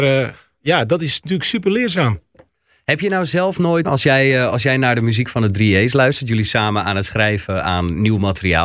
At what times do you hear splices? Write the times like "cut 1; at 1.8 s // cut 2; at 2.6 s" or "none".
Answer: cut 1; at 3.8 s // cut 2; at 6.4 s